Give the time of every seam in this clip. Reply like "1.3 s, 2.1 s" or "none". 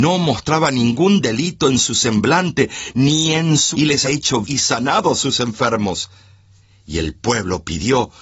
3.7 s, 4.0 s, 4.4 s